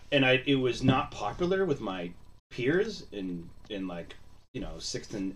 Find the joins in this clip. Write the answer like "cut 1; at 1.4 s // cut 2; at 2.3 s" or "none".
cut 1; at 2.4 s